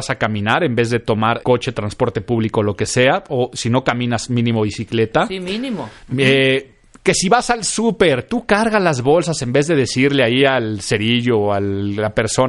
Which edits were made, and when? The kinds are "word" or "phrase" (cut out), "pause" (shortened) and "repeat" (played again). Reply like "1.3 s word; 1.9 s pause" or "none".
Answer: 1.4 s word